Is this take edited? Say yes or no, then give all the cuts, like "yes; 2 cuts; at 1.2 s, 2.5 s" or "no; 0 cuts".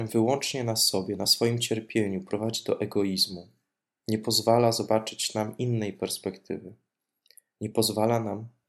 no; 0 cuts